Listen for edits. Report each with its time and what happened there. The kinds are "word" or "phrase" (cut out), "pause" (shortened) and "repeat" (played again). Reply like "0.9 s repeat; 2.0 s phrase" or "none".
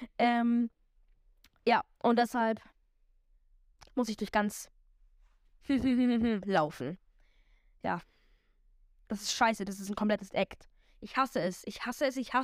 none